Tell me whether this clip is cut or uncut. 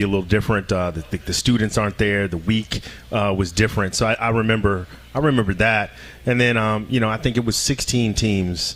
cut